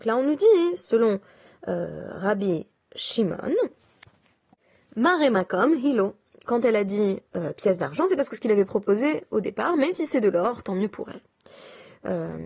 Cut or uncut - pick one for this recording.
uncut